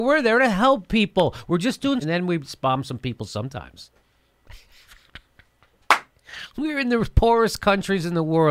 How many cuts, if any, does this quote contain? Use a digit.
1